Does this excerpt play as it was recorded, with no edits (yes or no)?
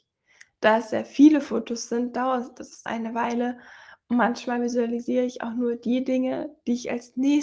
no